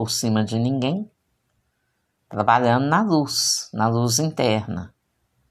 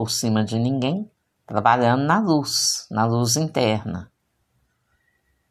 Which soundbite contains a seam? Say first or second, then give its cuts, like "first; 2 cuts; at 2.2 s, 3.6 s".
second; 1 cut; at 1.2 s